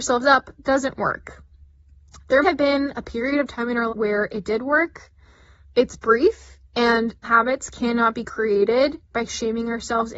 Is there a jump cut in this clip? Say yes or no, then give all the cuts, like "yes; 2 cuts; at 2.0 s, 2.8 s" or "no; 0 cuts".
yes; 4 cuts; at 2.4 s, 3.9 s, 5.6 s, 7.2 s